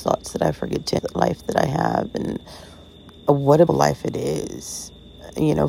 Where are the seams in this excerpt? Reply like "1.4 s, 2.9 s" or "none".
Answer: 1.0 s, 3.2 s, 3.7 s